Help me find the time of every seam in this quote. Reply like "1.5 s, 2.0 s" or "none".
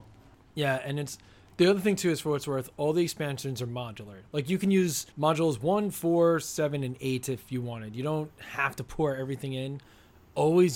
5.1 s